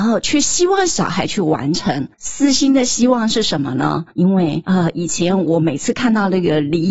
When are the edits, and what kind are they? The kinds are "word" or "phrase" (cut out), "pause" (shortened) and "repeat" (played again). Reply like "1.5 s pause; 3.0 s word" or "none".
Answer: 2.1 s pause; 4.1 s pause